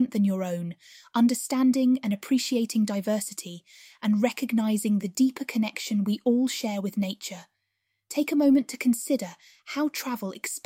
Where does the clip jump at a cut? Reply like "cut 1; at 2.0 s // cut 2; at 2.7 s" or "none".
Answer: none